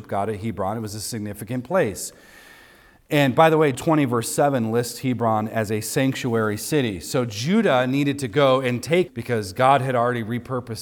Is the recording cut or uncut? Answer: cut